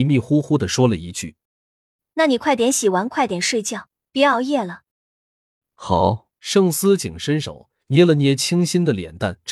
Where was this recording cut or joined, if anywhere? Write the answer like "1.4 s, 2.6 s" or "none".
1.4 s, 4.1 s, 4.9 s, 6.3 s, 7.8 s